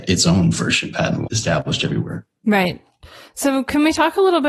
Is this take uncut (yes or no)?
no